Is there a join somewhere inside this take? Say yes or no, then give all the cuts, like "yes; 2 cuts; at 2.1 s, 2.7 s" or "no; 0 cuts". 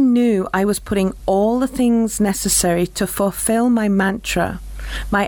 no; 0 cuts